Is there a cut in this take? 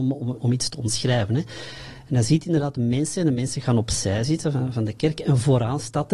no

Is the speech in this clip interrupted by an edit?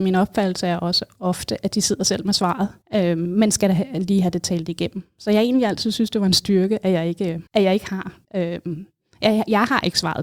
yes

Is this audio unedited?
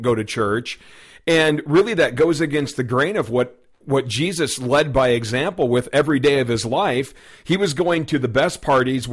yes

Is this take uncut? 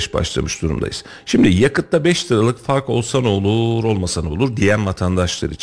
yes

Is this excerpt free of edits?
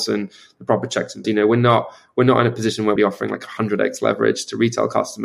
no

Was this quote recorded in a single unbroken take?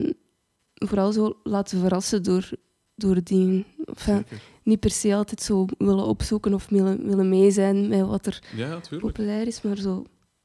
yes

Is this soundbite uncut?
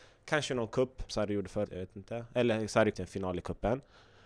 no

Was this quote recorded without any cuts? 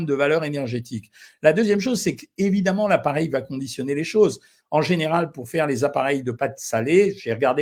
yes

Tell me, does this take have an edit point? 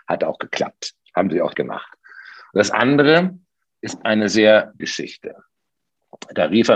yes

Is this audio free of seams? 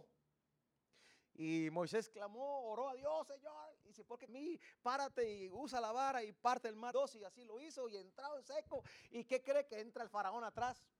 no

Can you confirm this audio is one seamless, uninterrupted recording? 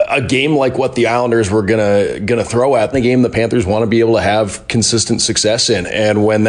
no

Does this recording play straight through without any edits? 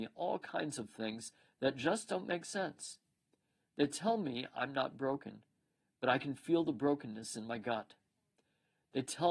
yes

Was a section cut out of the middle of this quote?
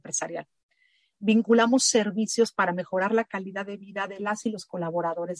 no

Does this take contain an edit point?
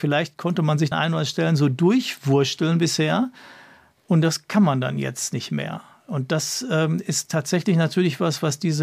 yes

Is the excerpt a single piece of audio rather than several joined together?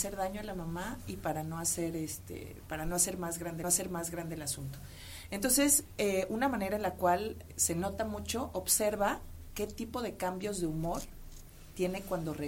no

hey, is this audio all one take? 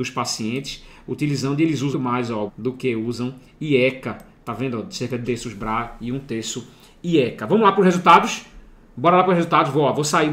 no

